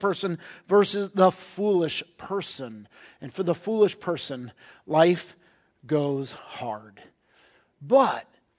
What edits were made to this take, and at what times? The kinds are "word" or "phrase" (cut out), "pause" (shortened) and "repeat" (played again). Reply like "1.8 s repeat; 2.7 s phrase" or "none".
none